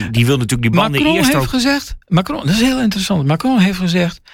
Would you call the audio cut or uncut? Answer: uncut